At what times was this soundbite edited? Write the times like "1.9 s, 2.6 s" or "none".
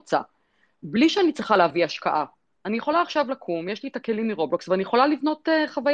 none